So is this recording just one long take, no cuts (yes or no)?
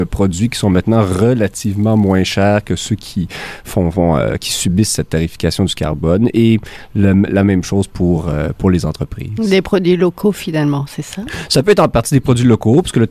yes